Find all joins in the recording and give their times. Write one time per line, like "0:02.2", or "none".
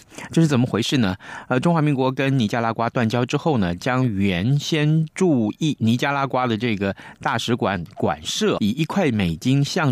0:08.6